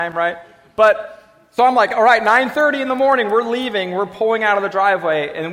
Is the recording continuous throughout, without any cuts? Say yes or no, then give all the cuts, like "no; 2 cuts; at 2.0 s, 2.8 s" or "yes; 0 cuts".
yes; 0 cuts